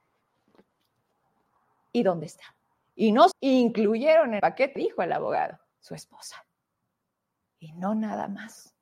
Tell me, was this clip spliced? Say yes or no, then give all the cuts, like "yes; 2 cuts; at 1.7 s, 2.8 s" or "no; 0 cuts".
yes; 5 cuts; at 2.7 s, 3.3 s, 4.4 s, 4.8 s, 5.7 s